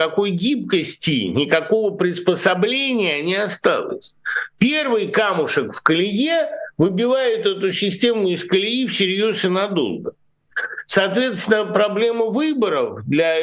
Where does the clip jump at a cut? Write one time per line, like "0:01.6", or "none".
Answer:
none